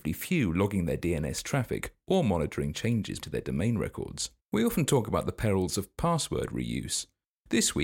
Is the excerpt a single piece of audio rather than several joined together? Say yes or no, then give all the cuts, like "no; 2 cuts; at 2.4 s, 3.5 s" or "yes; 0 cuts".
no; 2 cuts; at 3.2 s, 4.4 s